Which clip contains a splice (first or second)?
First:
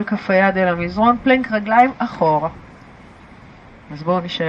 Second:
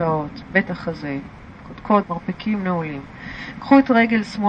second